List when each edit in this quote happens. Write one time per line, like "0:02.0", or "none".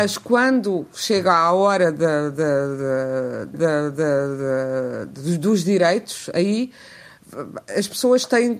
0:03.5